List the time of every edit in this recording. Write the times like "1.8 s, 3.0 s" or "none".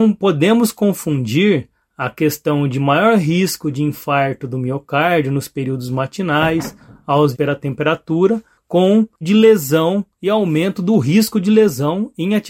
7.3 s, 9.2 s